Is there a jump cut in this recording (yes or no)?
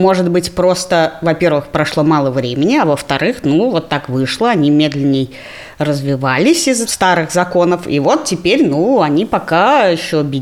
no